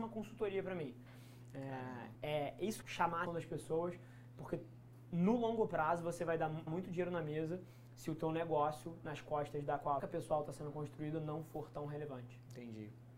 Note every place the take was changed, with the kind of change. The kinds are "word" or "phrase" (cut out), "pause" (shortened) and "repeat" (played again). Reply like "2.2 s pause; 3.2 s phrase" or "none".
2.1 s word; 2.8 s phrase; 3.3 s word; 6.7 s word; 10.0 s phrase